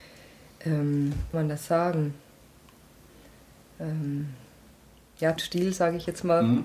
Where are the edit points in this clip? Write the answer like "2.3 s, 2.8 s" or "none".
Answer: 1.3 s, 5.4 s